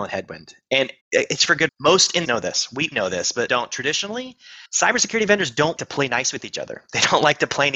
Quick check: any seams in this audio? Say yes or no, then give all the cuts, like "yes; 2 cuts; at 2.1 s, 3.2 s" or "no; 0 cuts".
yes; 7 cuts; at 1.0 s, 1.7 s, 2.2 s, 2.9 s, 3.5 s, 4.7 s, 5.8 s